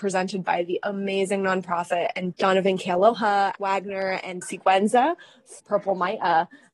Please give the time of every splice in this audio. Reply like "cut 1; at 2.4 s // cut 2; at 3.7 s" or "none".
cut 1; at 2.3 s // cut 2; at 3.6 s // cut 3; at 4.4 s // cut 4; at 5.6 s